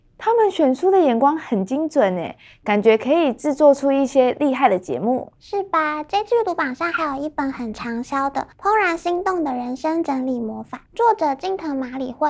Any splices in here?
yes; 3 cuts; at 5.4 s, 8.5 s, 10.9 s

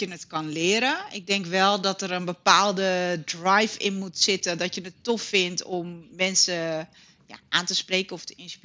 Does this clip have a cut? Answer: no; 0 cuts

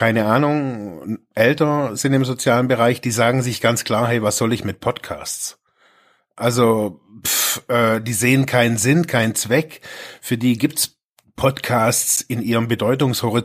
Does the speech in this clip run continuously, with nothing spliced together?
yes; 0 cuts

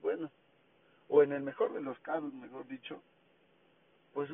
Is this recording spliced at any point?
no; 0 cuts

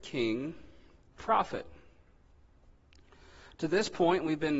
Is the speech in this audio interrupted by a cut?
yes; 1 cut; at 1.2 s

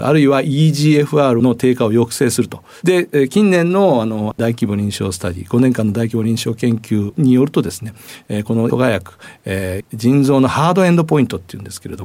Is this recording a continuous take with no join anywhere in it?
no; 1 cut; at 8.7 s

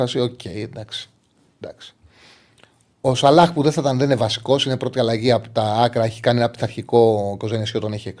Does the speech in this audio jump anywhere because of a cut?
no; 0 cuts

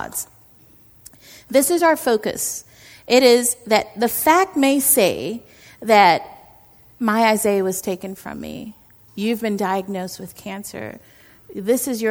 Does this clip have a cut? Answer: no; 0 cuts

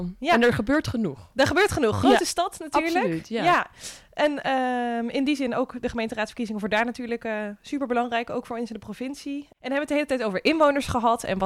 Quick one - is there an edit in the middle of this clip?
no; 0 cuts

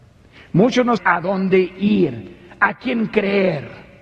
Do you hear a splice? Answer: yes; 1 cut; at 1.0 s

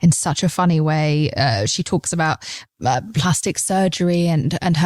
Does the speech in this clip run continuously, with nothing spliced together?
yes; 0 cuts

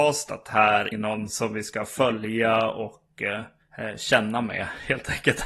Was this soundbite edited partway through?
yes; 1 cut; at 0.9 s

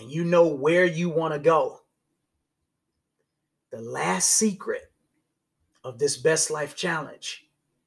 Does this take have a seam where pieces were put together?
no; 0 cuts

